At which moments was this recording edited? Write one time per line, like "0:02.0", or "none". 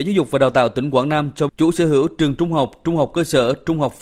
0:01.5